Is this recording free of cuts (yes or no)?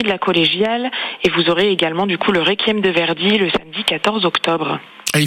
yes